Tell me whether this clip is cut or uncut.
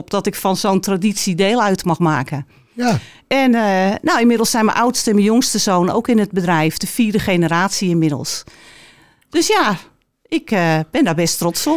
uncut